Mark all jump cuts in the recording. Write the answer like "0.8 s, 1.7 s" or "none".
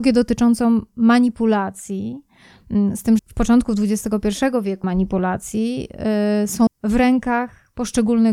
3.2 s, 4.8 s, 6.7 s